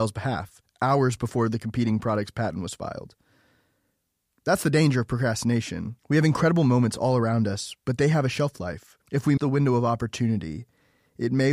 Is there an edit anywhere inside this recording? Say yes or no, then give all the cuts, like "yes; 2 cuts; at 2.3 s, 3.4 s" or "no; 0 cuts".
yes; 4 cuts; at 6.0 s, 7.8 s, 9.0 s, 9.4 s